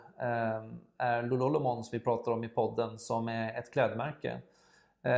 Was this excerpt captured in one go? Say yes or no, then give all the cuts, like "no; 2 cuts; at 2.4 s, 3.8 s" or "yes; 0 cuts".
yes; 0 cuts